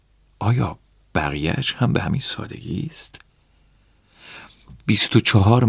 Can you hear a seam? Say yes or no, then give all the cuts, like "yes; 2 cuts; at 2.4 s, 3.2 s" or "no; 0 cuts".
no; 0 cuts